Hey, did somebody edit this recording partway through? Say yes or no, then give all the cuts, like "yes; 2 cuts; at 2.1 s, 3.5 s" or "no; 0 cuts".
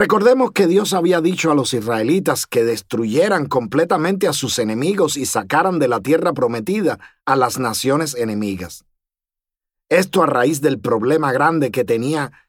no; 0 cuts